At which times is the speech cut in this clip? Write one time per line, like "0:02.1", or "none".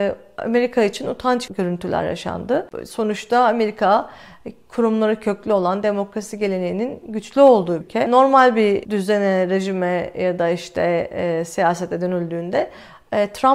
0:01.5
0:07.8